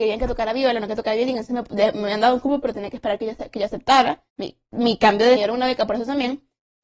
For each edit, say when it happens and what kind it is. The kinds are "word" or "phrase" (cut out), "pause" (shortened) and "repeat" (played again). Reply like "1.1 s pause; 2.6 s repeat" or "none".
4.3 s pause; 5.4 s phrase